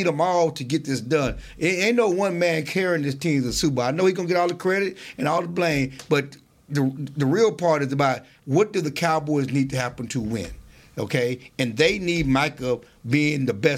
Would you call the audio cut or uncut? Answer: uncut